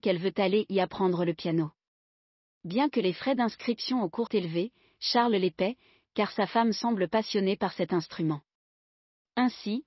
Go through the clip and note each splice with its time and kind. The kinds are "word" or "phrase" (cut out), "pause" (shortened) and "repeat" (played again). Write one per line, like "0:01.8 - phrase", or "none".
0:04.3 - word